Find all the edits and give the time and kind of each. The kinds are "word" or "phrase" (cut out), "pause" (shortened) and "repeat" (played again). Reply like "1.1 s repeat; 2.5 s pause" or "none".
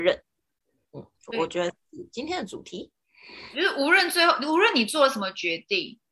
3.5 s word